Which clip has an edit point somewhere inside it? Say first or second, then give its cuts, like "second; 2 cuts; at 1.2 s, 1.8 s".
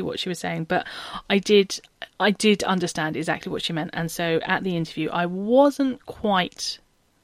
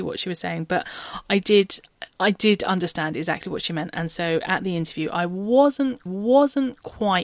second; 1 cut; at 6.1 s